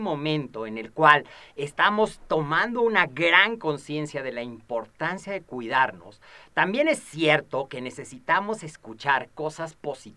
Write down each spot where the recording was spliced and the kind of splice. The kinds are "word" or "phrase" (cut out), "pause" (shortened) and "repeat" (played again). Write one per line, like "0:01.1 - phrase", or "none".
none